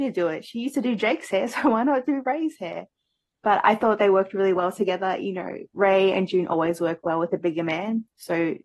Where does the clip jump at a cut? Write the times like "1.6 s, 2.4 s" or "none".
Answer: none